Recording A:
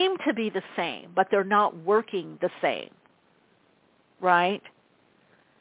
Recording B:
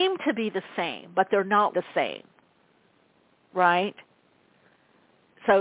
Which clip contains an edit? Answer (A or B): B